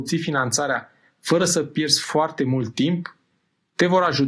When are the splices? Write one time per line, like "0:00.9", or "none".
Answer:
none